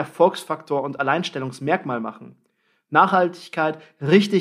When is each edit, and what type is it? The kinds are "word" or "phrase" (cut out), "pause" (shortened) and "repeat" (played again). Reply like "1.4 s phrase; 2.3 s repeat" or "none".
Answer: none